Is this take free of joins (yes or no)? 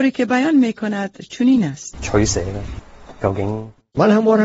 yes